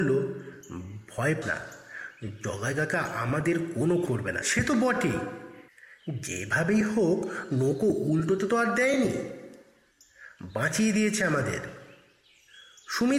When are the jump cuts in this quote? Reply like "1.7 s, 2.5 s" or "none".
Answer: 1.4 s, 4.1 s, 4.4 s